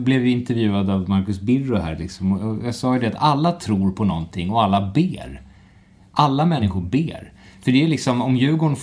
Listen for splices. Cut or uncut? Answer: uncut